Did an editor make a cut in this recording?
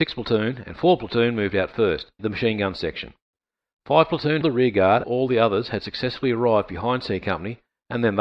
yes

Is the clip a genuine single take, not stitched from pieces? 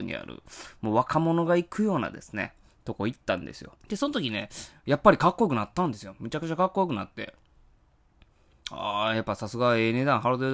no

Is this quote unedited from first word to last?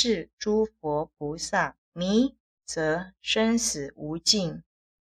no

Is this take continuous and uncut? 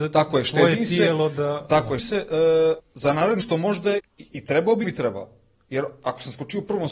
no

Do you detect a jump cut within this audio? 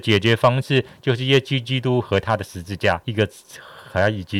yes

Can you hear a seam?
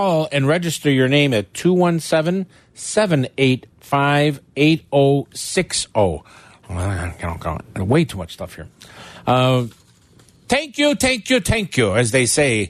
no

